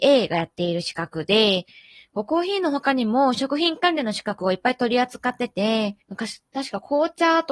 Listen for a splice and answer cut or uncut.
cut